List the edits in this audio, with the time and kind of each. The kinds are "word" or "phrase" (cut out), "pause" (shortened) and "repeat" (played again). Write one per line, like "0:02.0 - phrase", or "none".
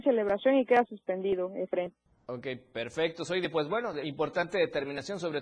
0:02.1 - pause